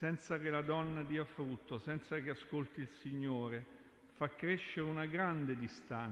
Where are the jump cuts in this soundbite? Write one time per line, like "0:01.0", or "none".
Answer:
none